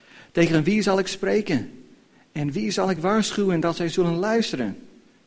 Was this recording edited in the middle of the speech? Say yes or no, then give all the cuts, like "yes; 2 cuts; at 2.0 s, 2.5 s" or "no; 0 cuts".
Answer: no; 0 cuts